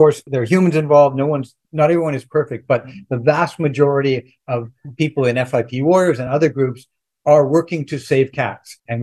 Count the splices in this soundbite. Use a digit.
0